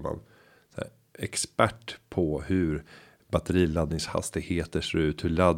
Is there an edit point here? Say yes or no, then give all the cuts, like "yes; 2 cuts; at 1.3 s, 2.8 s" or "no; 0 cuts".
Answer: no; 0 cuts